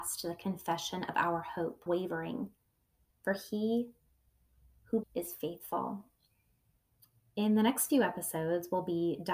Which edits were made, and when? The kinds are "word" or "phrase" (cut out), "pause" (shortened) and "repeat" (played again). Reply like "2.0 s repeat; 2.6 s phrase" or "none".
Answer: 1.9 s word; 5.0 s word